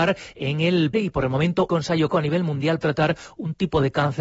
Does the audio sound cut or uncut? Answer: cut